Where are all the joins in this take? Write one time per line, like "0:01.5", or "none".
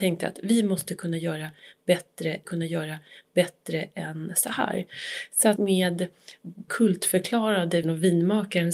0:02.4
0:05.6
0:06.7
0:07.8